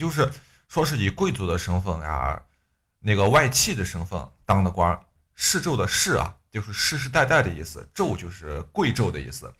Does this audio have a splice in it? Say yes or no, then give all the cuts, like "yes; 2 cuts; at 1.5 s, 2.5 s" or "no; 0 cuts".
no; 0 cuts